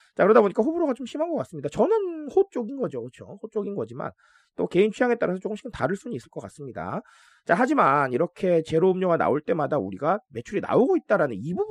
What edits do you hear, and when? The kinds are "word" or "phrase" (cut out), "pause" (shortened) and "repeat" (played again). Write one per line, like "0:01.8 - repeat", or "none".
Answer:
none

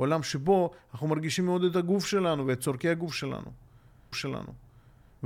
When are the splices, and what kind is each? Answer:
0:04.1 - repeat

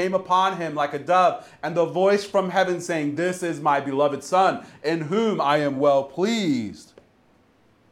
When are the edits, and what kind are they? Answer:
none

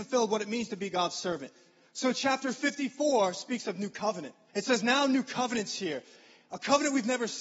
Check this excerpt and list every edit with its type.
0:04.5 - pause

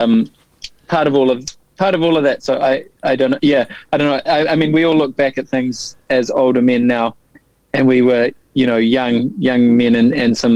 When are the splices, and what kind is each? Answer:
none

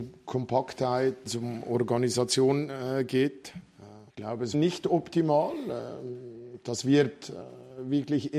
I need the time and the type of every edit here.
0:01.3 - word
0:04.1 - pause
0:04.5 - phrase

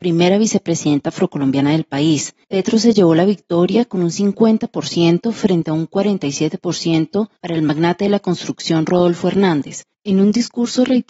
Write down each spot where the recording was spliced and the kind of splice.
0:02.4 - pause
0:07.4 - pause
0:09.9 - pause

